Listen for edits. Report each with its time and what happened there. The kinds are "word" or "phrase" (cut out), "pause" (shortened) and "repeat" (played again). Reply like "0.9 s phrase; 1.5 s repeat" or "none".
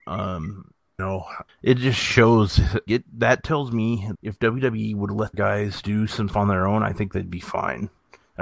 1.0 s word; 1.5 s word; 2.9 s word; 4.1 s word; 5.3 s word; 5.8 s word; 6.3 s word